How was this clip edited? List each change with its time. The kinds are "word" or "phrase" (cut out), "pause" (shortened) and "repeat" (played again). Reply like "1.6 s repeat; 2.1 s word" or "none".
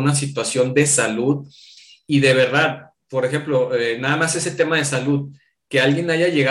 none